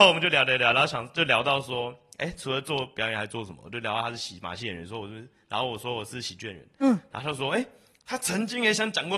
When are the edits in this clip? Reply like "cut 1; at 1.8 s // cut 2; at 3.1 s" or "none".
none